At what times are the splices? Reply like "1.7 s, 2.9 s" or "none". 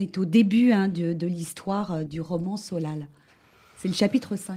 2.1 s